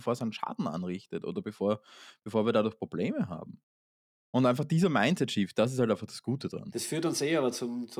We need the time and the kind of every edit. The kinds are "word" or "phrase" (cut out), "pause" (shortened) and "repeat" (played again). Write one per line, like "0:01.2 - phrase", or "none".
none